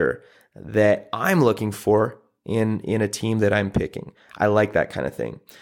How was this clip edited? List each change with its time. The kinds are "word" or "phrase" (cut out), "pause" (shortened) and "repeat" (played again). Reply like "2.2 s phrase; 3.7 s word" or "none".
none